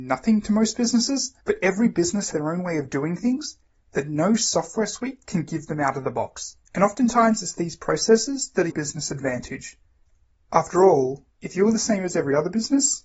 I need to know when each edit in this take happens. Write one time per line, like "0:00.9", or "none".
0:01.4
0:02.3
0:06.6
0:08.7